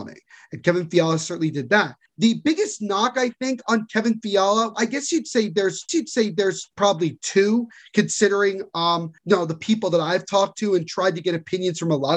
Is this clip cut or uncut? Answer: cut